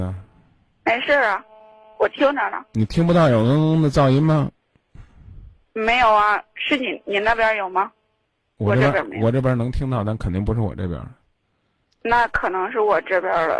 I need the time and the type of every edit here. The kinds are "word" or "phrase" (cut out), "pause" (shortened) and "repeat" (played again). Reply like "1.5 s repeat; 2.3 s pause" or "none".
none